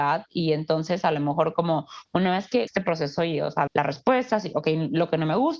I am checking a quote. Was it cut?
yes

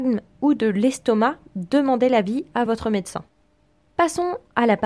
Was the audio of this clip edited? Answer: no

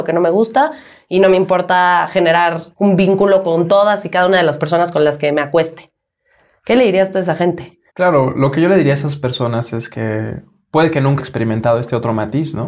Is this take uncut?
no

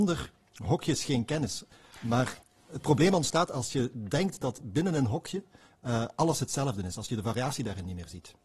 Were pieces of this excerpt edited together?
no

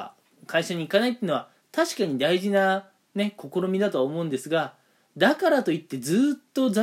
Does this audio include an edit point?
no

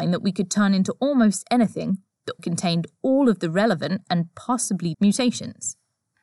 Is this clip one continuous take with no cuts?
no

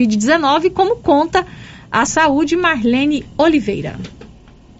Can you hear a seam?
yes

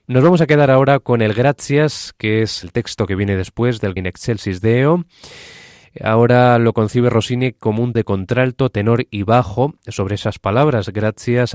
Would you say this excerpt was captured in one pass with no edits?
no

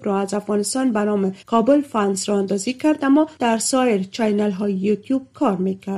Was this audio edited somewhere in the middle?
yes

